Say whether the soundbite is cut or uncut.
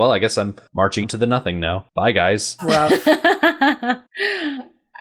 cut